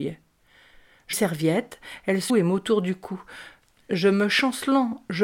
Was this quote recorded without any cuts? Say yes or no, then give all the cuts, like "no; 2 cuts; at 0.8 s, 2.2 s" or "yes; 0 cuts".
no; 2 cuts; at 1.1 s, 2.3 s